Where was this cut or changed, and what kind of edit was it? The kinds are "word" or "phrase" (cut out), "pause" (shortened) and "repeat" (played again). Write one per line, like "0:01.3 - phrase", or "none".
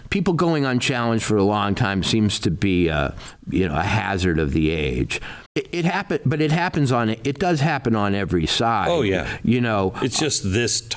0:05.5 - pause